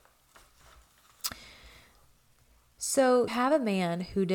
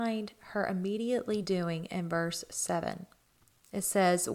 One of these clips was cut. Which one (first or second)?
first